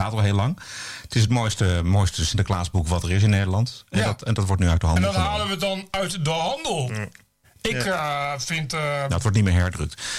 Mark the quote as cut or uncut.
uncut